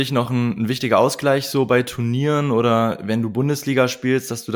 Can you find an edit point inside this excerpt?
no; 0 cuts

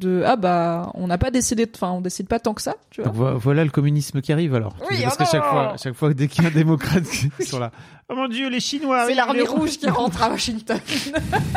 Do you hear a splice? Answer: no; 0 cuts

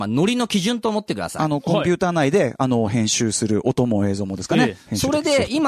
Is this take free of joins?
yes; 0 cuts

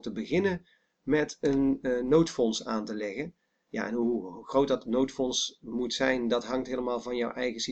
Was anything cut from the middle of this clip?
no; 0 cuts

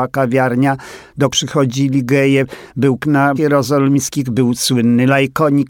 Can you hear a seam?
yes; 3 cuts; at 1.3 s, 3.0 s, 3.4 s

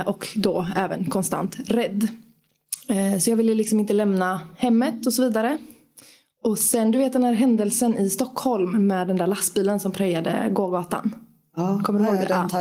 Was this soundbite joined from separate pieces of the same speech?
no; 0 cuts

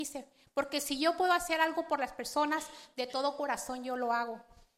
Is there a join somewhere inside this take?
no; 0 cuts

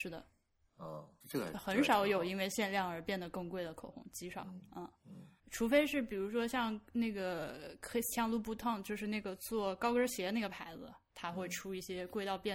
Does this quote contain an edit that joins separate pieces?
yes; 2 cuts; at 1.2 s, 5.4 s

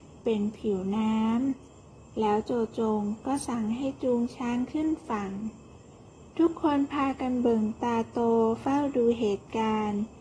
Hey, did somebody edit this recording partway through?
no; 0 cuts

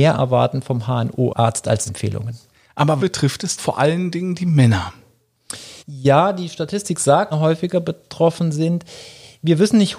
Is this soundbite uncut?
no; 5 cuts; at 1.9 s, 3.0 s, 3.6 s, 5.8 s, 7.3 s

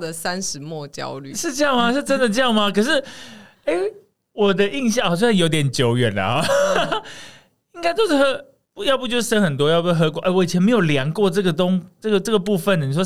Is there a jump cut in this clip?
no; 0 cuts

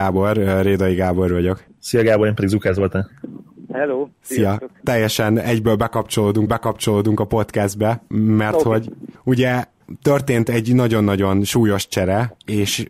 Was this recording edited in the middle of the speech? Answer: yes; 1 cut; at 6.5 s

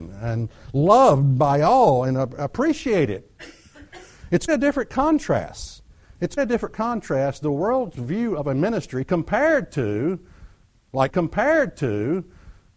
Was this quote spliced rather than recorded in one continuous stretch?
yes; 3 cuts; at 4.5 s, 6.4 s, 11.1 s

